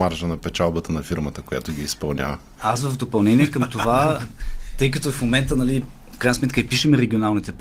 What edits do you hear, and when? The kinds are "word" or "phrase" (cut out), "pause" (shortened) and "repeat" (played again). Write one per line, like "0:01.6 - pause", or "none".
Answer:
none